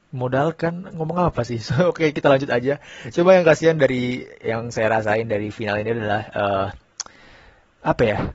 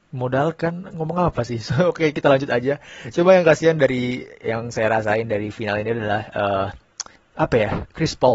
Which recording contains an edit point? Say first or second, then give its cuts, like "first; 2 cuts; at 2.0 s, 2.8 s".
second; 1 cut; at 7.2 s